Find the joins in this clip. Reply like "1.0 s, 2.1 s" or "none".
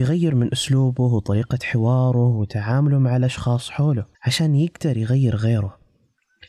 4.1 s